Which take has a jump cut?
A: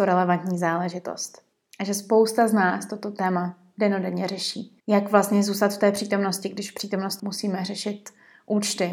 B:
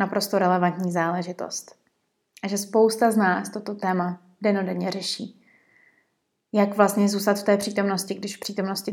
A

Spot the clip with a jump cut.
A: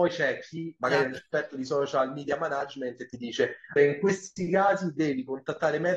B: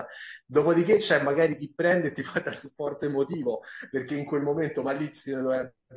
A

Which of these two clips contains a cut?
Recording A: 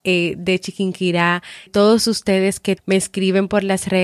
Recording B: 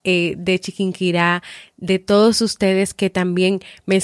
A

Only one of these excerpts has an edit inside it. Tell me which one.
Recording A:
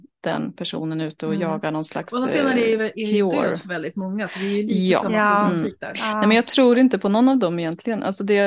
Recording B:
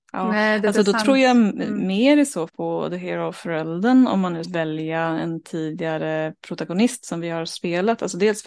B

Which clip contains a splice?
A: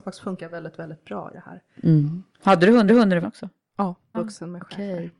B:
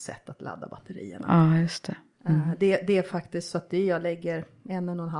A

